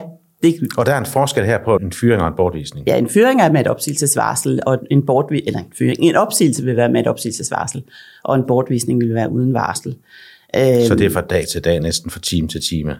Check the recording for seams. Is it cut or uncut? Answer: cut